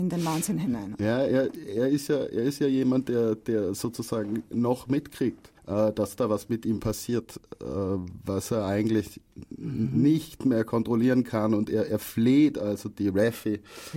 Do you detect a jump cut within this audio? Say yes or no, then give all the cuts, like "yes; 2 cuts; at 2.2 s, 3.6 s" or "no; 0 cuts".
yes; 1 cut; at 5.6 s